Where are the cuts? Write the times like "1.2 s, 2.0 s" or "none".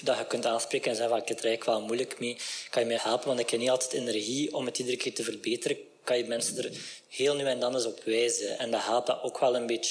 3.0 s